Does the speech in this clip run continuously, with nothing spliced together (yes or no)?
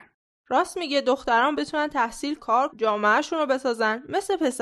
no